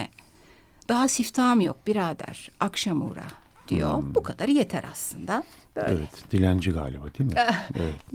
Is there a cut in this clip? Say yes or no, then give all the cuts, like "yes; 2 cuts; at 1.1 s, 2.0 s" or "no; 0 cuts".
no; 0 cuts